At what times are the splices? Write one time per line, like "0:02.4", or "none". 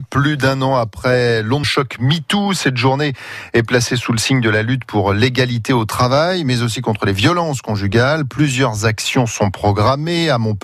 0:01.6

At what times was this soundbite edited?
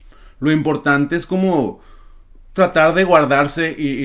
none

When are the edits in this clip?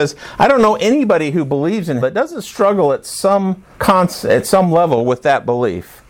0:02.0
0:03.7

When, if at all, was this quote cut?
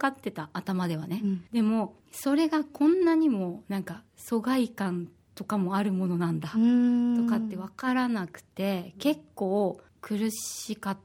0:01.5
0:02.0
0:04.1
0:05.3
0:09.9

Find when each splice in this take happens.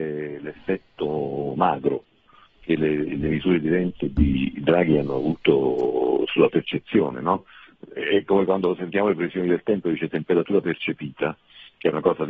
none

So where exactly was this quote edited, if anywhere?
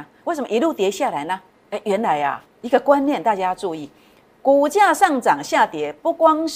0:02.5

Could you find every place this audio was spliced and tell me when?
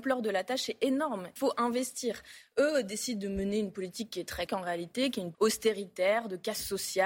0:01.4
0:04.5
0:05.3

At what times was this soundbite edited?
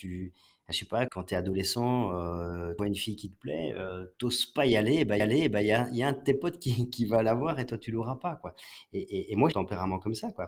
0:01.1
0:02.8
0:04.1
0:05.2
0:09.5

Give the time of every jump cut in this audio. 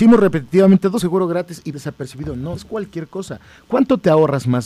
0:01.0
0:01.7
0:02.6

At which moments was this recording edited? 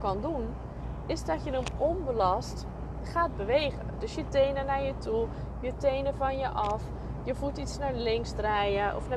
none

